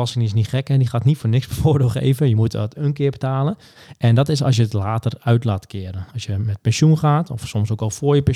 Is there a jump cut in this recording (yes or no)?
no